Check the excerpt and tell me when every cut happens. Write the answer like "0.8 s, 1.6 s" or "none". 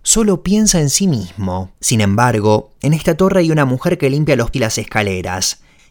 1.7 s, 4.5 s